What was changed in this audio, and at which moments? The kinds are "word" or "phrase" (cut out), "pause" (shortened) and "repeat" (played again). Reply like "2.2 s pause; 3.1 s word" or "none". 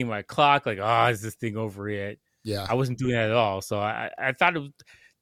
none